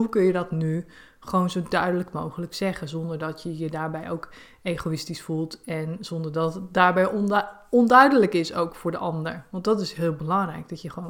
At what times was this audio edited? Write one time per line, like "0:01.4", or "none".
none